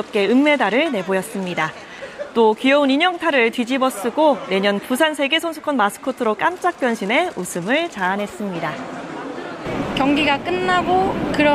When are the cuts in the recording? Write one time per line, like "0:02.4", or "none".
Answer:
none